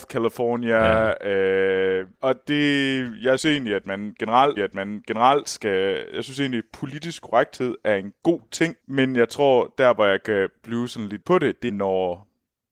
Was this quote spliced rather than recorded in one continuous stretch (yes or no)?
yes